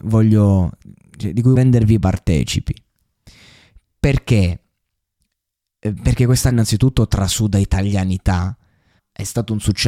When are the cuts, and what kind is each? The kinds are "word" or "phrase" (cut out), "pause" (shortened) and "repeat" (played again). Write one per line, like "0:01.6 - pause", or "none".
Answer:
0:01.6 - word
0:06.5 - word
0:09.0 - word